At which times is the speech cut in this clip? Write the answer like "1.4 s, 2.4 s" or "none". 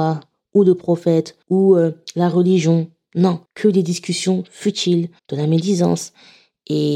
1.4 s, 3.4 s, 5.2 s